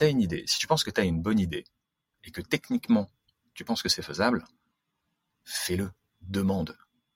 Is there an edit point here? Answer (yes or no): no